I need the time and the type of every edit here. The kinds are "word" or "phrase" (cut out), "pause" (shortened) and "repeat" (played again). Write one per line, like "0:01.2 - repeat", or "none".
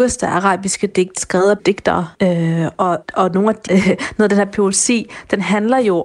0:01.2 - word
0:01.6 - word
0:02.1 - pause
0:03.0 - word
0:03.7 - word